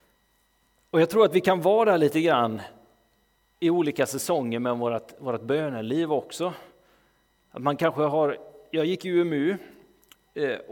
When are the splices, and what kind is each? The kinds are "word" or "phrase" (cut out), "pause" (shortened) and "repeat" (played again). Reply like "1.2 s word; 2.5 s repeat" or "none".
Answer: none